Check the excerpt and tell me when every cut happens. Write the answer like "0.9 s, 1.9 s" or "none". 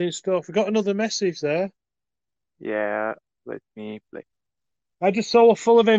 none